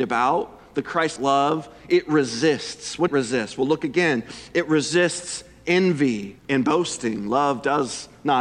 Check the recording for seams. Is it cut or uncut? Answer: cut